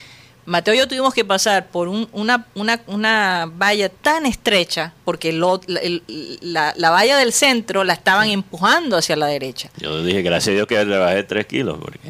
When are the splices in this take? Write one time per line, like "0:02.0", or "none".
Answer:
0:04.0
0:05.0